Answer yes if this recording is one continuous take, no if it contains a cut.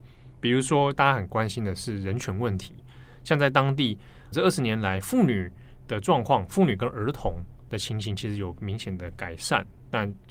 no